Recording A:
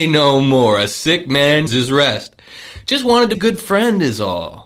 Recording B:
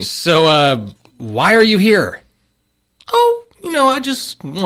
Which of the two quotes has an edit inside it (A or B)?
A